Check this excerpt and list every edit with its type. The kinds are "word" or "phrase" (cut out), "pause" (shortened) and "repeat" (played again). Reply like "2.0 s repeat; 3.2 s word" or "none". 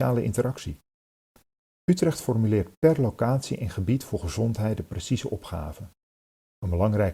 none